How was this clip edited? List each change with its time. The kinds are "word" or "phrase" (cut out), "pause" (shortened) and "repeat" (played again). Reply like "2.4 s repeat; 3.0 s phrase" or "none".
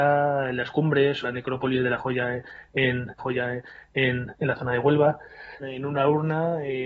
1.2 s word; 3.2 s repeat; 5.6 s phrase